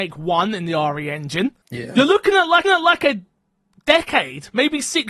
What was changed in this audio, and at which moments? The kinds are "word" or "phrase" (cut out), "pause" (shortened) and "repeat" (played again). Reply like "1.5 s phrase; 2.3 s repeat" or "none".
1.6 s pause; 2.6 s repeat

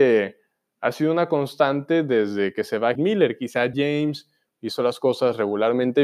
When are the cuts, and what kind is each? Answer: 3.0 s word; 3.7 s word

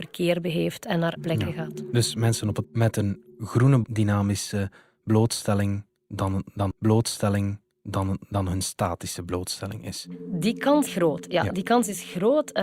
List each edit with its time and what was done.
1.2 s word; 2.6 s word; 3.8 s phrase; 6.7 s repeat; 10.9 s word

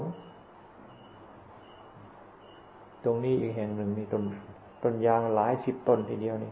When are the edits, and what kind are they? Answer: 2.9 s pause; 4.7 s pause

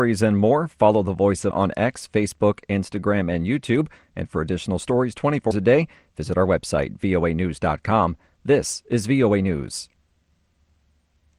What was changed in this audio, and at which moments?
1.5 s word; 5.5 s word

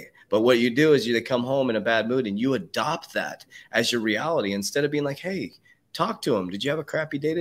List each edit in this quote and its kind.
none

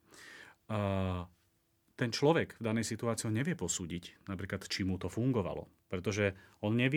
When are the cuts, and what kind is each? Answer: none

